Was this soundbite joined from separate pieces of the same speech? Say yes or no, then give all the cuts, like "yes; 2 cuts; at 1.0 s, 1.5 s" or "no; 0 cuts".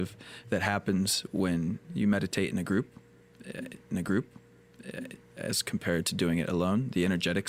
yes; 1 cut; at 3.9 s